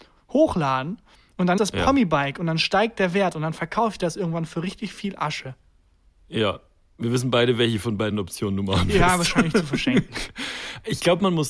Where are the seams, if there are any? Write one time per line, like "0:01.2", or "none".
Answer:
0:01.6